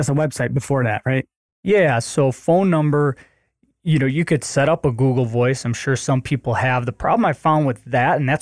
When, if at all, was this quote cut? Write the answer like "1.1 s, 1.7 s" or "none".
none